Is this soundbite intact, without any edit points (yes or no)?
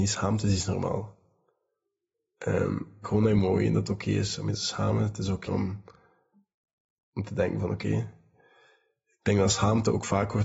no